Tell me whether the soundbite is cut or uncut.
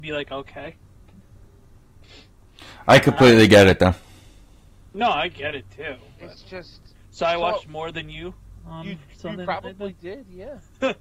uncut